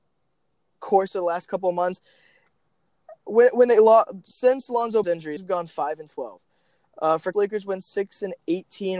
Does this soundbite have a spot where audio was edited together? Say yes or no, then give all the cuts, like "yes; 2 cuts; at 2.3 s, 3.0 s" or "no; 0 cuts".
yes; 4 cuts; at 4.3 s, 5.0 s, 5.4 s, 7.3 s